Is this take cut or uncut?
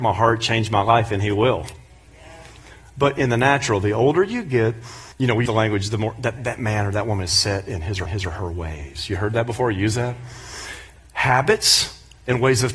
cut